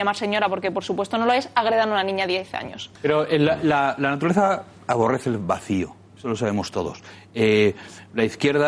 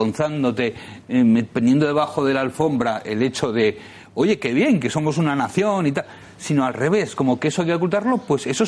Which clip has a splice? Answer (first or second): first